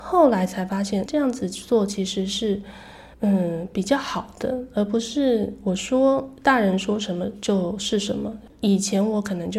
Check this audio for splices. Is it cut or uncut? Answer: cut